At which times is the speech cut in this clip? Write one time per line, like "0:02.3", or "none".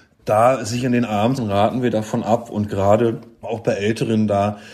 0:01.4
0:03.4